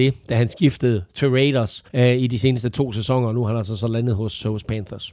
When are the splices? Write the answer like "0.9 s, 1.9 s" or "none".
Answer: 1.9 s